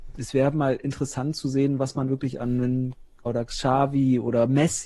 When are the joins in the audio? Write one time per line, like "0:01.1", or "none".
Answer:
0:02.1
0:03.3